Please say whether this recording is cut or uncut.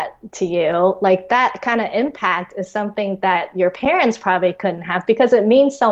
uncut